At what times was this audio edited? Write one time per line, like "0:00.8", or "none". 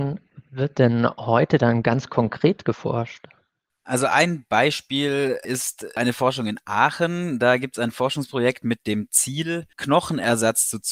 0:03.7
0:09.7